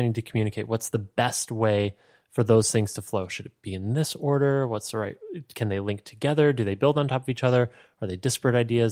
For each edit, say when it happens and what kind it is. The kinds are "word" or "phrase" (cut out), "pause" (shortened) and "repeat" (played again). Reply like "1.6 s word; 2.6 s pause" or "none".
none